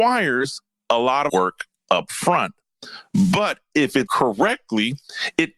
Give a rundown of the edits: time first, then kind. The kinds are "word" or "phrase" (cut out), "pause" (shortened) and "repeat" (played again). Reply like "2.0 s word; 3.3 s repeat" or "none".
1.3 s word; 4.1 s word